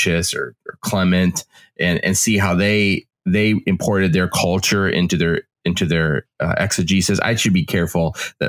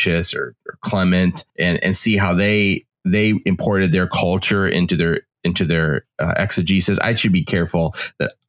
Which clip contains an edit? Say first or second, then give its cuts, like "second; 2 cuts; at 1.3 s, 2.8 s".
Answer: second; 1 cut; at 1.5 s